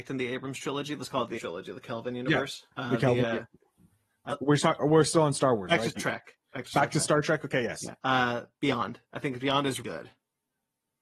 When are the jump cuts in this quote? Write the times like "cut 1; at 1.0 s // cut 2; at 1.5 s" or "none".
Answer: cut 1; at 1.4 s // cut 2; at 2.7 s // cut 3; at 4.3 s // cut 4; at 4.8 s // cut 5; at 6.0 s // cut 6; at 8.0 s // cut 7; at 9.0 s // cut 8; at 9.8 s